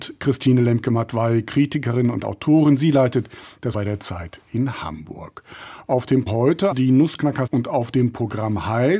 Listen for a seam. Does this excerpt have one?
yes; 4 cuts; at 3.7 s, 6.3 s, 6.7 s, 7.5 s

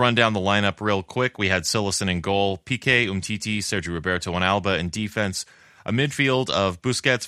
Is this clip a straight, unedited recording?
yes; 0 cuts

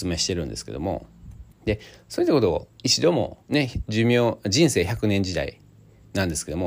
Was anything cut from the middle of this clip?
yes; 3 cuts; at 1.5 s, 2.7 s, 3.4 s

